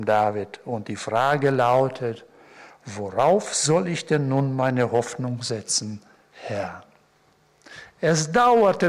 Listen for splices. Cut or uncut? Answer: uncut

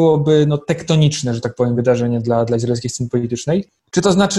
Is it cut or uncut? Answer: uncut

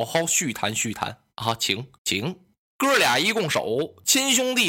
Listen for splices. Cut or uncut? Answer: cut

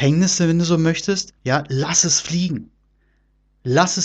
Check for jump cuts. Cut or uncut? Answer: cut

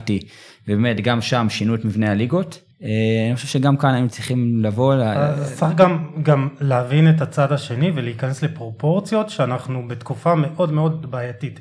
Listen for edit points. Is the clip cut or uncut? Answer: cut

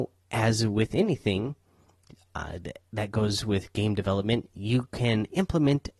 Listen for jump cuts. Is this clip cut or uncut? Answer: uncut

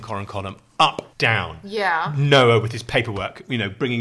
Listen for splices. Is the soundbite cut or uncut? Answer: cut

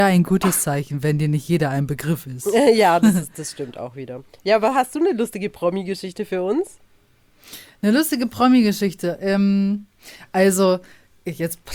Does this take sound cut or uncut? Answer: uncut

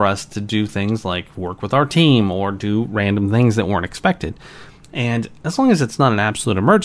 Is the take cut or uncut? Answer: uncut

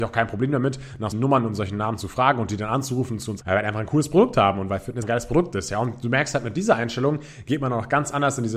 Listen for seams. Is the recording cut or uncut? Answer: cut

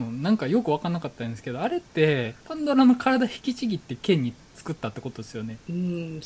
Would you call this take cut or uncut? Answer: cut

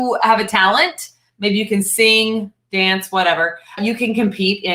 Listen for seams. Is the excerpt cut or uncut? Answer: cut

